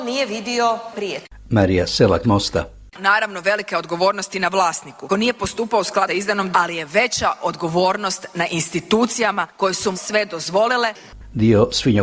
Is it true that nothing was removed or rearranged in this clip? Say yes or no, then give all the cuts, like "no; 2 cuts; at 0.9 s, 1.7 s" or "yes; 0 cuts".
no; 5 cuts; at 2.2 s, 5.1 s, 6.1 s, 6.5 s, 9.9 s